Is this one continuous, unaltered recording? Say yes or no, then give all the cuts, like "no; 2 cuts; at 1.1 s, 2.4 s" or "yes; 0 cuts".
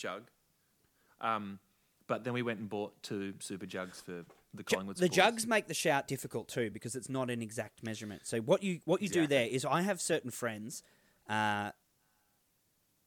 yes; 0 cuts